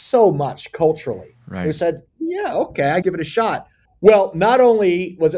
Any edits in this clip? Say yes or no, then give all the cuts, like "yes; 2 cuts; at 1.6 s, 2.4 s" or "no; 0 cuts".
yes; 3 cuts; at 2.1 s, 3.0 s, 3.8 s